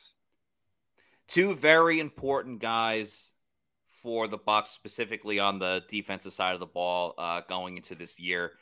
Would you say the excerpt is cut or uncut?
uncut